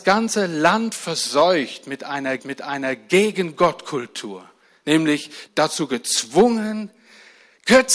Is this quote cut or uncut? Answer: cut